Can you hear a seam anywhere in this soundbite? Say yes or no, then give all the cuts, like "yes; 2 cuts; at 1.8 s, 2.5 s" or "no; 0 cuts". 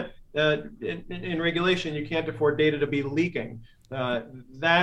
no; 0 cuts